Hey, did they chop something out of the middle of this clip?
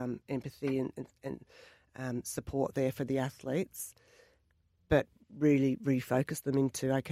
no; 0 cuts

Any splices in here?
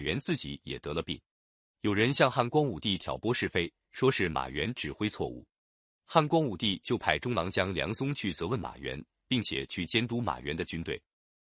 no; 0 cuts

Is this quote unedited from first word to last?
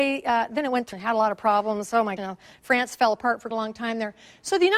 no; 3 cuts; at 0.9 s, 2.2 s, 3.5 s

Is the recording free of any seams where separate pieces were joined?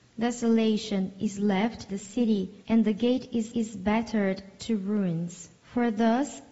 no; 4 cuts; at 1.9 s, 2.6 s, 3.5 s, 5.6 s

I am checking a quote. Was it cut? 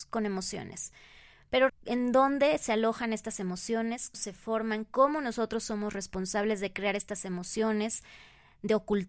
yes; 2 cuts; at 1.7 s, 4.1 s

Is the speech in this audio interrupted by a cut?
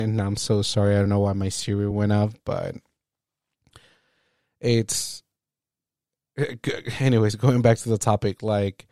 no; 0 cuts

